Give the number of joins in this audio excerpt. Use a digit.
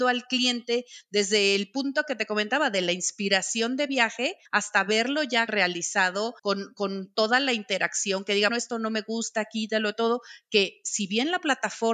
4